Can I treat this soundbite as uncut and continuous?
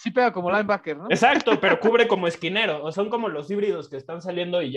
no; 1 cut; at 2.9 s

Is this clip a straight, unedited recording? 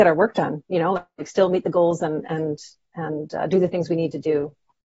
yes; 0 cuts

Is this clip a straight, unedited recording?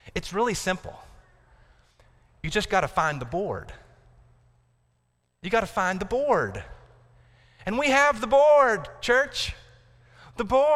yes; 0 cuts

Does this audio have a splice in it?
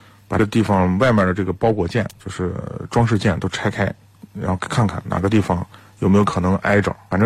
no; 0 cuts

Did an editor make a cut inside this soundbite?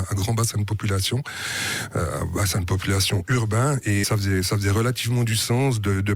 yes; 1 cut; at 4.0 s

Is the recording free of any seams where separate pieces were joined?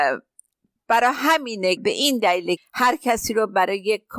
no; 2 cuts; at 1.8 s, 2.6 s

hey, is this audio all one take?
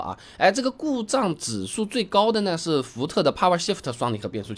yes; 0 cuts

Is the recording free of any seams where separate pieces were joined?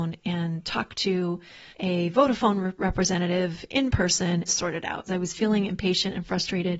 no; 3 cuts; at 1.7 s, 4.5 s, 5.1 s

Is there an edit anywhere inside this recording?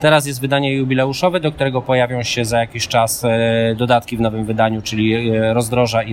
no; 0 cuts

